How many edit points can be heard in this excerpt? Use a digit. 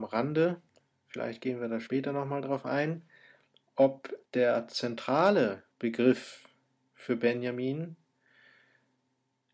2